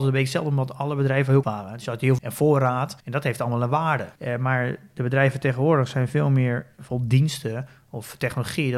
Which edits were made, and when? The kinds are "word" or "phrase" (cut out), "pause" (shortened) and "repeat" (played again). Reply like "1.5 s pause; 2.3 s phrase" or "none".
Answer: 1.4 s word; 2.2 s word; 3.0 s pause; 4.2 s pause